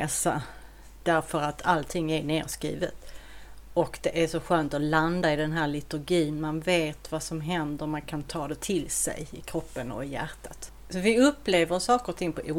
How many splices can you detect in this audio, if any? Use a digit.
0